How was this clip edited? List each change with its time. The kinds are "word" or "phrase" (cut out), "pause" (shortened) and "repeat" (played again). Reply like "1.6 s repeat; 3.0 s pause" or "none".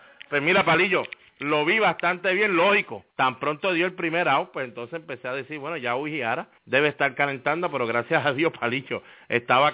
3.1 s pause; 6.6 s pause